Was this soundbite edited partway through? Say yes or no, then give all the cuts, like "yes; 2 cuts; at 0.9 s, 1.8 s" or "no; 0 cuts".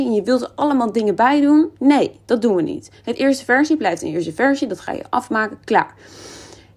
no; 0 cuts